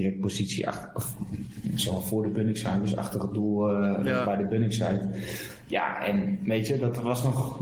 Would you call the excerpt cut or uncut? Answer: uncut